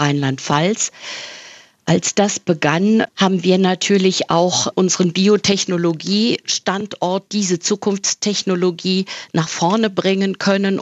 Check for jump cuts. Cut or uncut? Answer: uncut